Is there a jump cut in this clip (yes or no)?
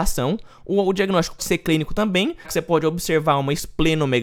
yes